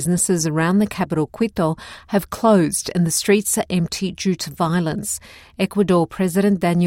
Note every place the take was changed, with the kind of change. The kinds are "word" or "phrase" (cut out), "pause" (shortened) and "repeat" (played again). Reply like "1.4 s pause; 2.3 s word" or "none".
none

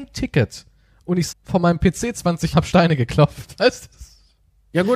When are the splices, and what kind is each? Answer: 1.3 s word; 2.5 s word

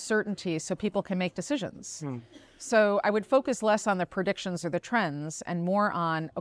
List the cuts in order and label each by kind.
none

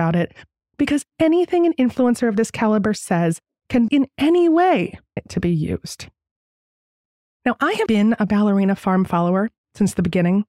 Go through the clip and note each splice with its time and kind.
3.9 s word; 5.2 s phrase; 7.9 s word

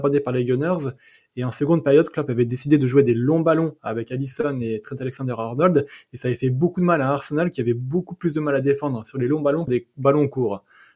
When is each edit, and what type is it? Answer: 9.7 s word

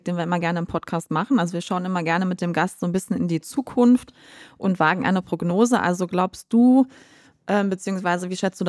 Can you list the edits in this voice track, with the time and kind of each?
none

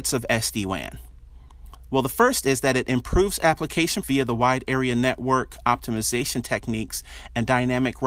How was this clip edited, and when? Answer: 4.0 s word

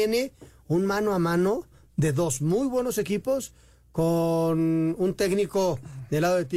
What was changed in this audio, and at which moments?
none

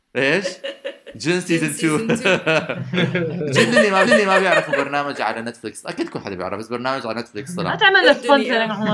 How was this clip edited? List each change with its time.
4.0 s repeat

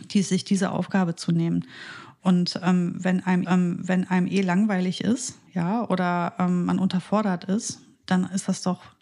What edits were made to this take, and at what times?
3.4 s repeat; 5.5 s pause

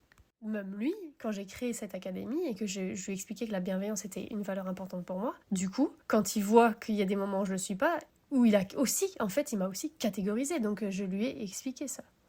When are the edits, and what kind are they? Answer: 5.4 s pause; 6.0 s pause; 8.1 s pause

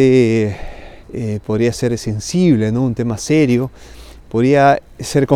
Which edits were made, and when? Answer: 1.0 s pause; 4.2 s pause

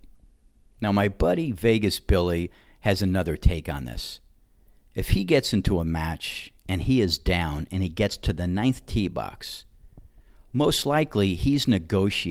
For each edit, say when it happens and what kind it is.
none

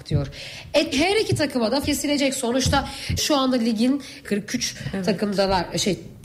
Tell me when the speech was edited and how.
0.9 s word; 1.8 s word; 3.2 s word; 4.2 s word

